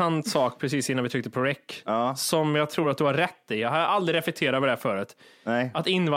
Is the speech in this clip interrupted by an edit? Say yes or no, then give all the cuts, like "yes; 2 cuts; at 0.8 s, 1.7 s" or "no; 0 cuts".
no; 0 cuts